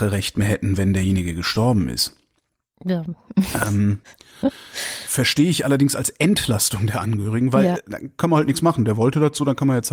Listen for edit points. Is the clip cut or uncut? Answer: uncut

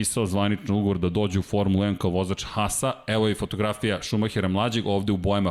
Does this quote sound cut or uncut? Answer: uncut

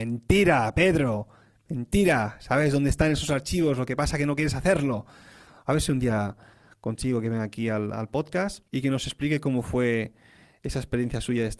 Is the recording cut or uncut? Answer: cut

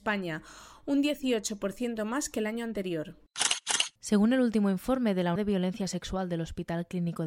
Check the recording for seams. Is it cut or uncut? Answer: cut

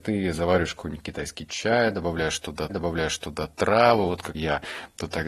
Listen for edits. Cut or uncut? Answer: cut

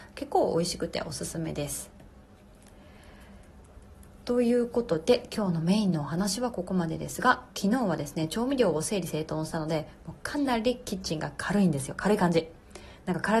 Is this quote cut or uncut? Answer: cut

